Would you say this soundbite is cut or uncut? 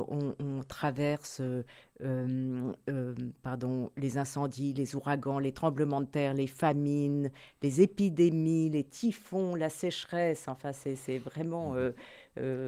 uncut